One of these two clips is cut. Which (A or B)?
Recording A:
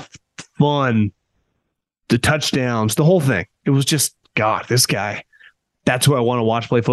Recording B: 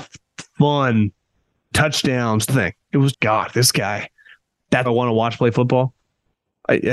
B